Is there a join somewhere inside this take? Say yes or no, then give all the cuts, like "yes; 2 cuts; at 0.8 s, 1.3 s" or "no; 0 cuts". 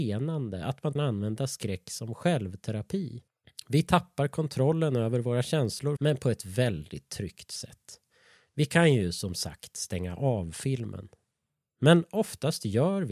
yes; 2 cuts; at 1.0 s, 6.0 s